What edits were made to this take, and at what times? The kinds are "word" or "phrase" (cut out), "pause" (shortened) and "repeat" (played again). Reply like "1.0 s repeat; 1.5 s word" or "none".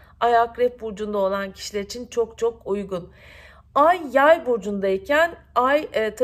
none

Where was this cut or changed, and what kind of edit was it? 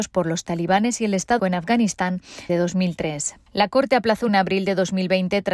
1.4 s word; 2.5 s word; 3.5 s pause; 4.3 s phrase

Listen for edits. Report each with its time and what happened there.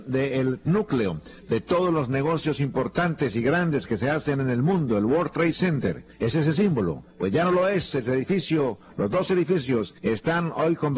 6.1 s pause; 7.1 s pause; 10.0 s pause

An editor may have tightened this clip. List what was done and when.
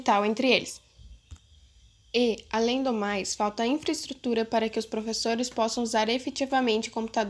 none

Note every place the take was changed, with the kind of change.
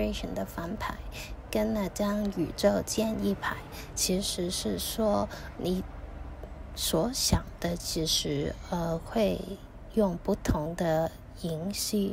5.6 s word

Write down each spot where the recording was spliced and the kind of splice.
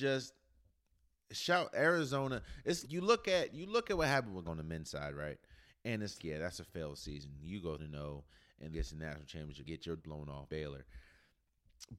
2.8 s word; 4.5 s word; 6.2 s word; 7.8 s word; 8.7 s word; 9.6 s word; 10.0 s word; 10.5 s word

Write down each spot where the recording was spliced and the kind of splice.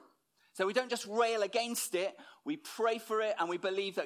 none

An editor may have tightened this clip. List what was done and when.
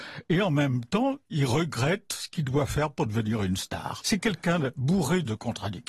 none

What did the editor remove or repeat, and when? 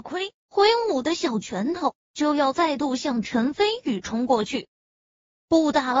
4.7 s pause

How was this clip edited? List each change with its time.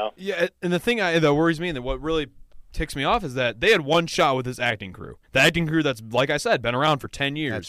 5.2 s pause

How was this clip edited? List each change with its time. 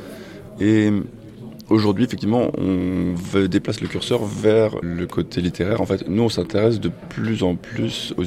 4.8 s word

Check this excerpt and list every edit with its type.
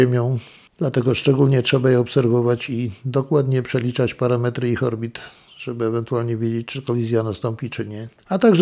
none

